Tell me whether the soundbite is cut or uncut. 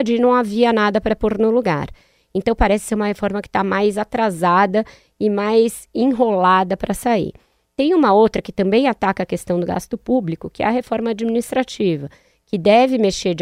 uncut